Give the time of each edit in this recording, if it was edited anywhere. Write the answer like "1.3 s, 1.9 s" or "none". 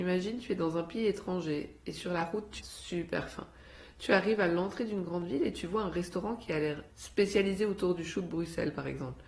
2.6 s, 6.9 s